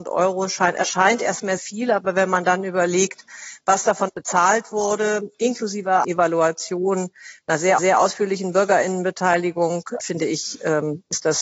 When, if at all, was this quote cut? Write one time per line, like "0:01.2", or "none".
0:01.6
0:04.1
0:06.0
0:07.8
0:10.0